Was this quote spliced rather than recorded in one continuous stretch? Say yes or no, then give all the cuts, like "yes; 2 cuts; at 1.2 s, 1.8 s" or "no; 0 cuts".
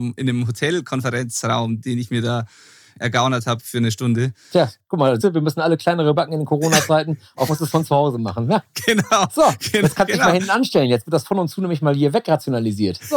yes; 3 cuts; at 5.2 s, 6.1 s, 7.5 s